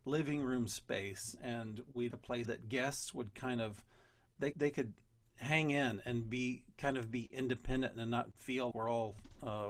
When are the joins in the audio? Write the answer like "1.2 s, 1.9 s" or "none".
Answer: 2.1 s, 2.4 s, 4.5 s, 8.7 s